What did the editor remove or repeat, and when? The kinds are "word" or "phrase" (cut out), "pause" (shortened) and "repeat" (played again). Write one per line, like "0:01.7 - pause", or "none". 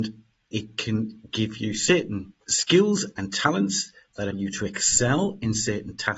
0:02.4 - pause
0:04.3 - word